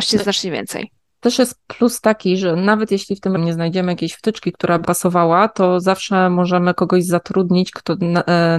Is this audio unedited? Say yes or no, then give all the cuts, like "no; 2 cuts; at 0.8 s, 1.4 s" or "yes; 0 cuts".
no; 2 cuts; at 3.4 s, 4.8 s